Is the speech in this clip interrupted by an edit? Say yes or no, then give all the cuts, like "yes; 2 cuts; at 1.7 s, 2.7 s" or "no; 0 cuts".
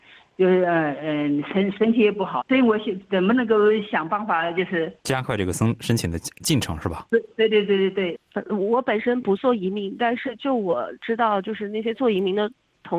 yes; 3 cuts; at 2.4 s, 5.0 s, 8.2 s